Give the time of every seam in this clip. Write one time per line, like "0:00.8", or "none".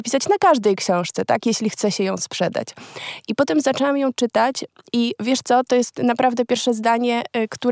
none